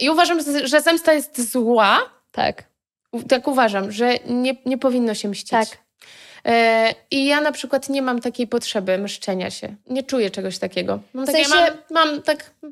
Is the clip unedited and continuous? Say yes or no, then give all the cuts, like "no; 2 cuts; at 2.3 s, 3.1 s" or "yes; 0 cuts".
yes; 0 cuts